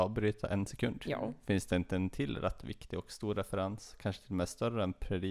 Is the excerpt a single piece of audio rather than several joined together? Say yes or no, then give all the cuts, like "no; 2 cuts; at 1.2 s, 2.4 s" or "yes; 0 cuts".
yes; 0 cuts